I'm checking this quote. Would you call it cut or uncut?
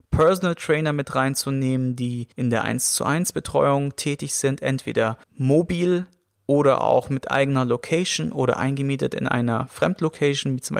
cut